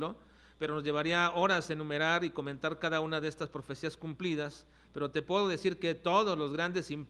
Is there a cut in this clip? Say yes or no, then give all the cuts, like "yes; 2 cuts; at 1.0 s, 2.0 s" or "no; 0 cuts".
no; 0 cuts